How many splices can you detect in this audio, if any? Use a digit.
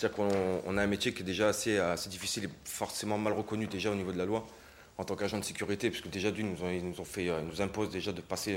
0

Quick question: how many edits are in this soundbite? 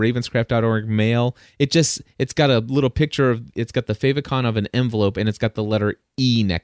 0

